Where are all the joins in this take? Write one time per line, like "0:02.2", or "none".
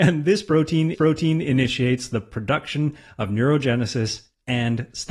0:00.9